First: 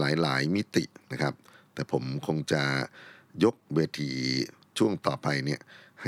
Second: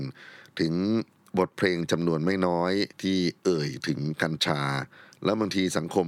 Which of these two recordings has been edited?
second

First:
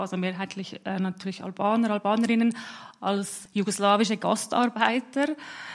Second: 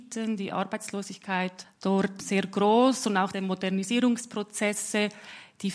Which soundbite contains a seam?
second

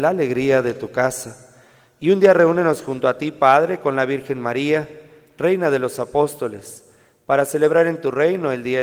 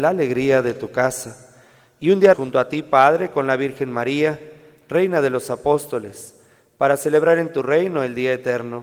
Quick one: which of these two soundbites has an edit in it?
second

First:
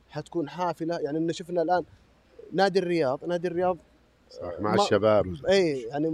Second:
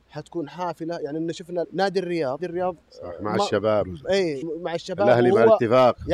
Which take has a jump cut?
second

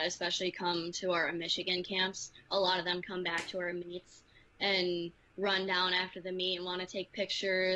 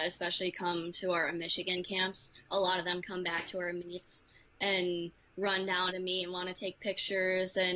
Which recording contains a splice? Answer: second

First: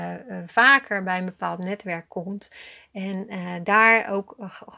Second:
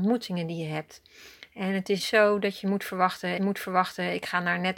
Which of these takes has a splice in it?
second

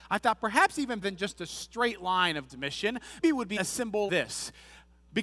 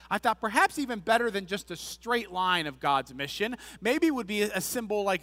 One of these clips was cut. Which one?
first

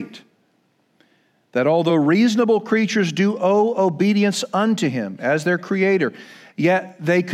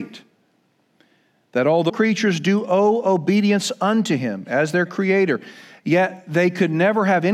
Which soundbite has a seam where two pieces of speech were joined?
second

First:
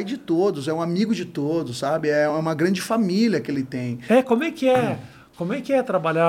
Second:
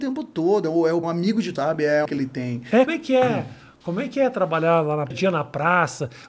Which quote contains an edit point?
second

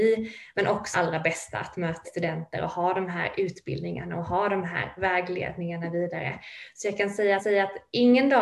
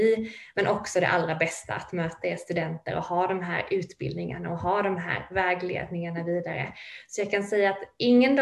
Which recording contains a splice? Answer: first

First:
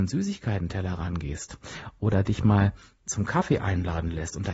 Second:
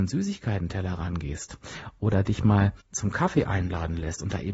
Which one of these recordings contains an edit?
second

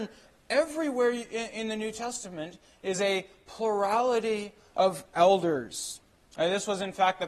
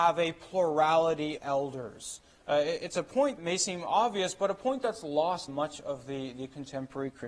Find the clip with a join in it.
second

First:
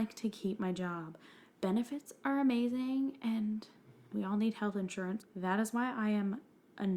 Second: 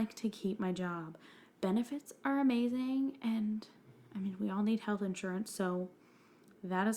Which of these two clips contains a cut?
first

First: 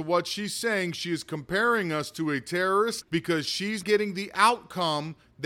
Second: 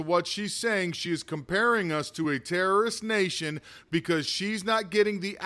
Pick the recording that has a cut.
first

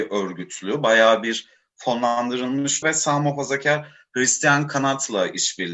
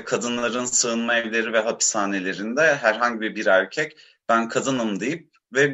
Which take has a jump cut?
first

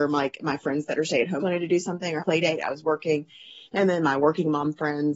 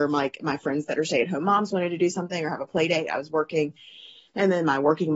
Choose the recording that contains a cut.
first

